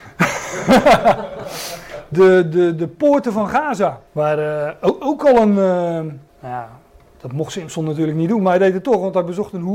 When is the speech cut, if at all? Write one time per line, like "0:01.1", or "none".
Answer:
0:02.1
0:04.1
0:06.3